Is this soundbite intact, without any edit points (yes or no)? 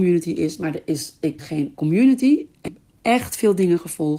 no